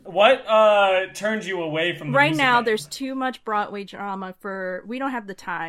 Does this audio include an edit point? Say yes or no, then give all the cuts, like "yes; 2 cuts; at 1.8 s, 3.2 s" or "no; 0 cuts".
no; 0 cuts